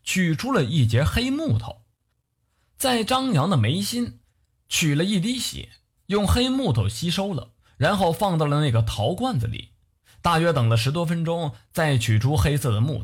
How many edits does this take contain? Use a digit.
0